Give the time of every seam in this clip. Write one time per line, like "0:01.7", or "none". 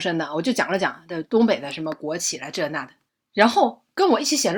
0:03.1

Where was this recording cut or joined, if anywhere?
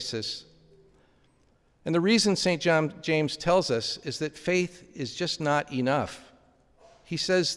none

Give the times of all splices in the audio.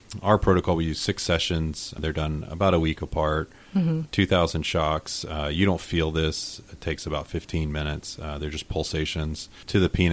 none

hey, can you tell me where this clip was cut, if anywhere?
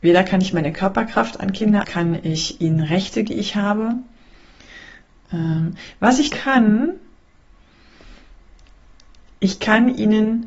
0:01.8
0:03.3
0:06.3

